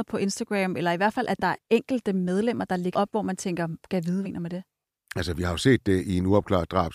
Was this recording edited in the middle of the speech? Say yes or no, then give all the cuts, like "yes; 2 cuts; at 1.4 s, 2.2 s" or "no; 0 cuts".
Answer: yes; 3 cuts; at 1.6 s, 2.9 s, 4.2 s